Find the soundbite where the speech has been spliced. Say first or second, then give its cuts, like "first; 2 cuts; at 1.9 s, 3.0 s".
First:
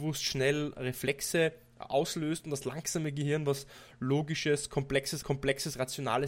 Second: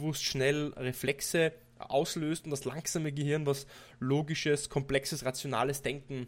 first; 1 cut; at 5.2 s